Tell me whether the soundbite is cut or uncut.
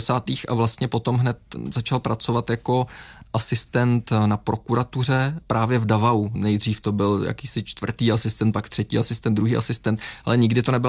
uncut